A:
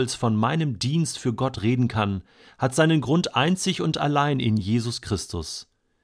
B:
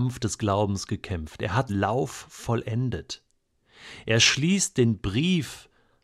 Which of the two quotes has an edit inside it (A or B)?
B